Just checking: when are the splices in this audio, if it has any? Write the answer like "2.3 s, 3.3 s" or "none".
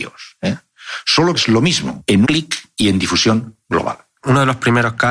1.4 s, 2.2 s